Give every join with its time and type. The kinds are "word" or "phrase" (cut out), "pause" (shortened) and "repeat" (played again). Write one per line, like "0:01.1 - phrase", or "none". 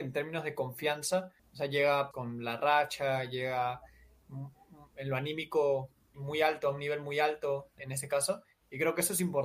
0:01.4 - pause
0:02.1 - word
0:06.1 - word
0:07.8 - word